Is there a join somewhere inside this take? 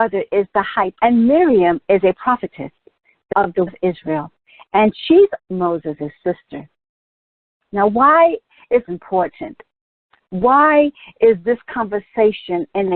yes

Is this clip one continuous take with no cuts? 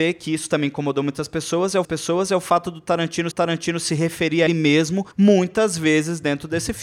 no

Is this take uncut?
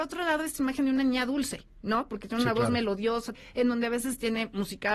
no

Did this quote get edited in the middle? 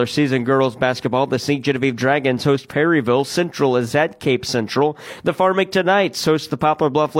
no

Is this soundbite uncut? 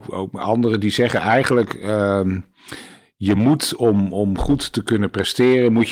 yes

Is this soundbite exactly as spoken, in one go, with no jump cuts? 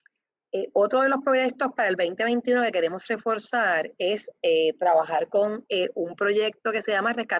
yes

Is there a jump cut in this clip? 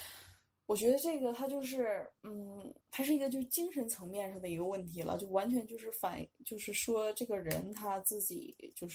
yes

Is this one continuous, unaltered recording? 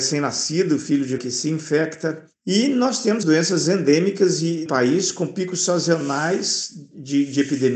no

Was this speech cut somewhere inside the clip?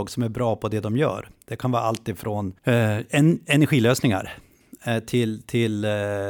yes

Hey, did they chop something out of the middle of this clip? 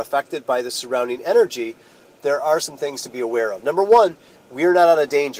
no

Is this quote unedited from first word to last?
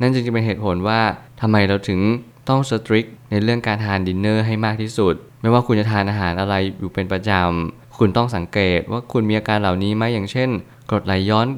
yes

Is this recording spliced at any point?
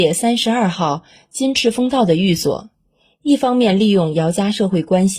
no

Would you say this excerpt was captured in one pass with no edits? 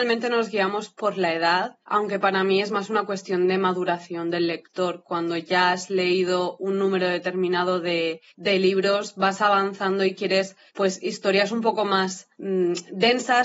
no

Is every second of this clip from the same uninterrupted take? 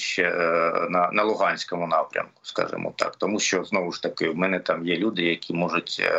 yes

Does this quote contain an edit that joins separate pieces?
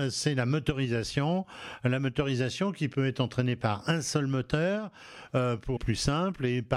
yes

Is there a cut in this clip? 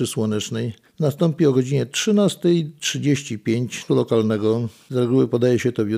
yes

